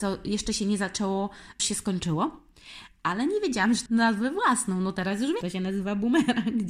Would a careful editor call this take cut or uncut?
cut